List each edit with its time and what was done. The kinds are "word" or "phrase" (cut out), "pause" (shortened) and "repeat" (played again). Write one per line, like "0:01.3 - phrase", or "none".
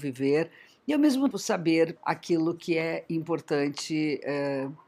0:01.3 - word
0:02.0 - word